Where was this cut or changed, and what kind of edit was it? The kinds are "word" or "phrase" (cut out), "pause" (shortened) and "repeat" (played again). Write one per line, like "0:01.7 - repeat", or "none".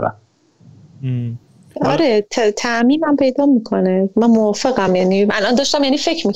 none